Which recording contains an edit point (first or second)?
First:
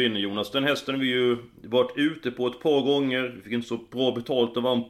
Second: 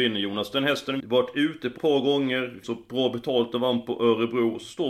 second